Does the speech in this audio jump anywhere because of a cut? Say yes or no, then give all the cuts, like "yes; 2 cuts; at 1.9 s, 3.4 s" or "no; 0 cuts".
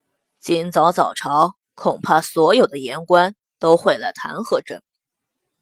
yes; 1 cut; at 1.6 s